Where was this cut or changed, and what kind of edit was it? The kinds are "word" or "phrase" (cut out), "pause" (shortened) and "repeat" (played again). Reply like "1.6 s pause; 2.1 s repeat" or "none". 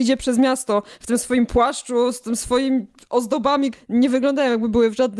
3.7 s word